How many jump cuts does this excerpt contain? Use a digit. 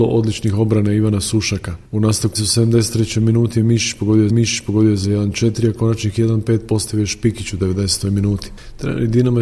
3